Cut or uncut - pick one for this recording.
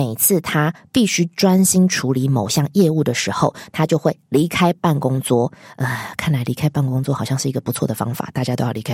uncut